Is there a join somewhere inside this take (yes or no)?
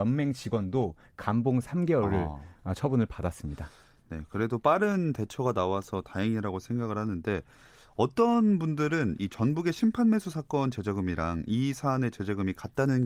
no